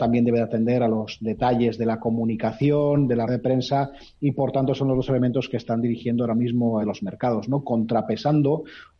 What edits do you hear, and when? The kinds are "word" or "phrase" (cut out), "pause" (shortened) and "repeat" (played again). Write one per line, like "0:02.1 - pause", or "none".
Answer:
0:03.3 - word
0:06.8 - phrase